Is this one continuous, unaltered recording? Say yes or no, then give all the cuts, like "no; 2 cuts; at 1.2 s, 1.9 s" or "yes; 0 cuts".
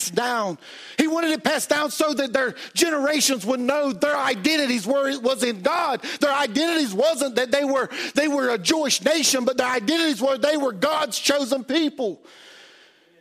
yes; 0 cuts